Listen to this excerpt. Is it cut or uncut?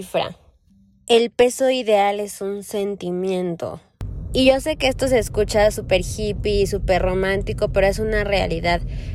uncut